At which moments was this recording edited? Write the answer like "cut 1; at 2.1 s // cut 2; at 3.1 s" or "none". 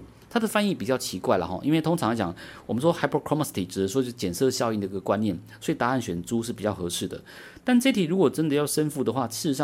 none